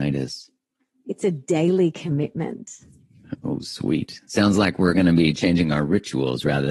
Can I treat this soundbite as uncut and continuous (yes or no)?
yes